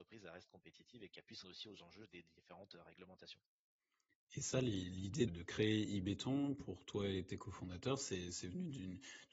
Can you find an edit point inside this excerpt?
yes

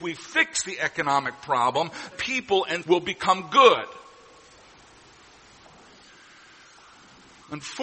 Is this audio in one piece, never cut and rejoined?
no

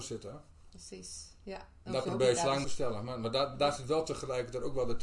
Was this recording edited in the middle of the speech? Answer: yes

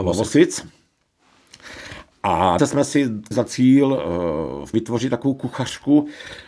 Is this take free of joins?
no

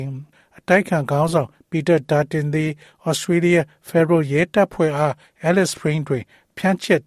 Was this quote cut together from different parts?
no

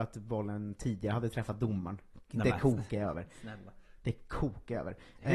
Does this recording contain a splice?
no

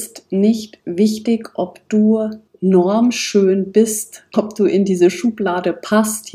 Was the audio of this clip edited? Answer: yes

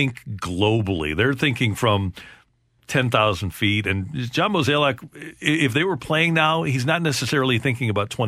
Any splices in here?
no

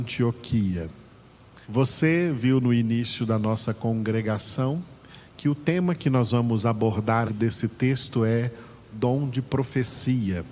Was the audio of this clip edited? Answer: yes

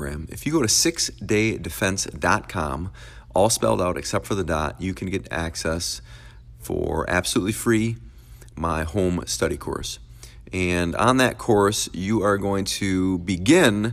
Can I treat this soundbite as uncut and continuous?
yes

